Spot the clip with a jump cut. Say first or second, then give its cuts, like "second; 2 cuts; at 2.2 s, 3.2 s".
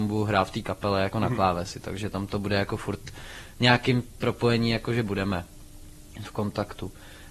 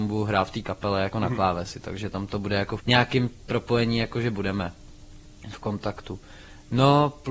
second; 1 cut; at 2.8 s